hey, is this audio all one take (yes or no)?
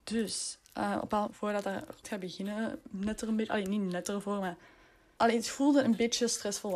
no